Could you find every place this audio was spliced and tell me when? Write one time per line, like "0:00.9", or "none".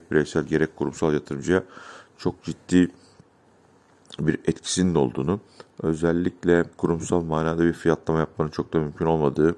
0:06.7